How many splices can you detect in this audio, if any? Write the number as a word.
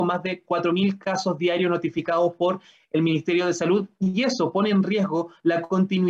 zero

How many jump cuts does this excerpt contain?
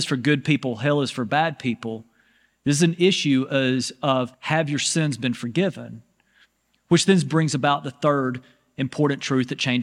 one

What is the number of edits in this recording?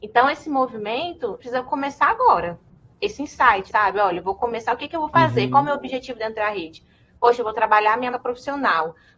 three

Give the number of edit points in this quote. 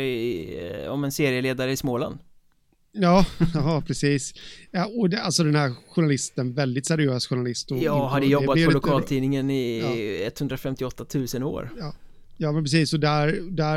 zero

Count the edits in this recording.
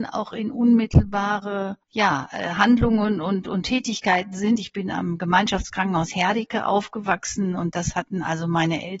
one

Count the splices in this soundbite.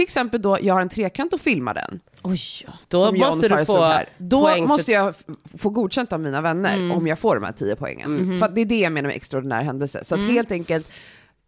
one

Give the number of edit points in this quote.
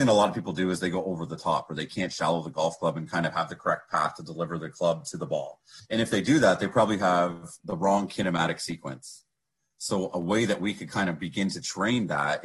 zero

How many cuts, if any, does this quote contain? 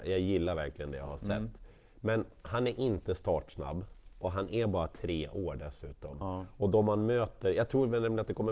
zero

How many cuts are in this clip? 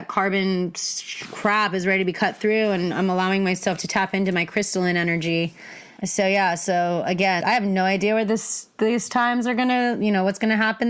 two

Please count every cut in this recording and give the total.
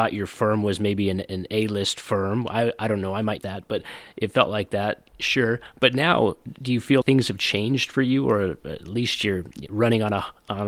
three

